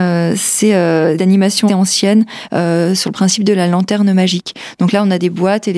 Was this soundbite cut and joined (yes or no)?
yes